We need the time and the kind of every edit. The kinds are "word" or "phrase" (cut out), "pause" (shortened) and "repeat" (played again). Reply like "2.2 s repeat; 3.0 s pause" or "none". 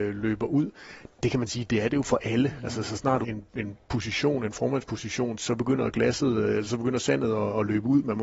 3.2 s phrase

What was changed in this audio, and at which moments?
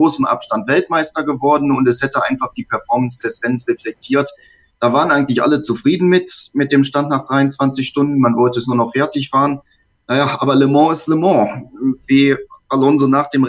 none

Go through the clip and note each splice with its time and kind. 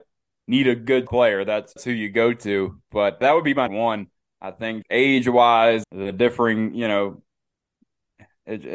1.1 s word; 1.8 s word; 3.2 s word; 3.7 s word; 4.8 s word; 5.8 s word

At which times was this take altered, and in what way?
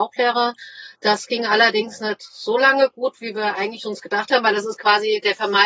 0.9 s pause

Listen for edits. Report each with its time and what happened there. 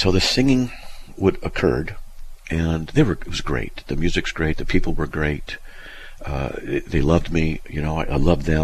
none

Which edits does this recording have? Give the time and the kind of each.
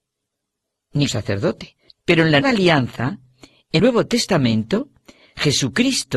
1.1 s word; 1.9 s pause; 2.4 s word; 3.8 s word

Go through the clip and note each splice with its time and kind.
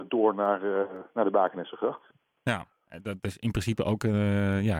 none

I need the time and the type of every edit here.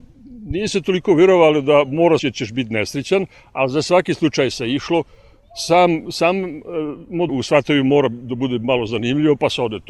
2.2 s phrase; 7.3 s word

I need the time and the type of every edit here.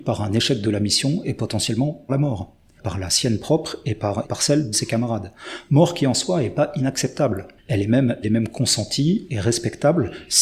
2.1 s word; 2.8 s word; 4.2 s word; 4.7 s word; 7.6 s pause; 8.2 s word

